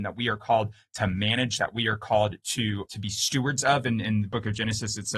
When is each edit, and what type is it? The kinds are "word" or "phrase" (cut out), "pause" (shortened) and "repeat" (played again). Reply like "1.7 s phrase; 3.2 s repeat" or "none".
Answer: 2.9 s word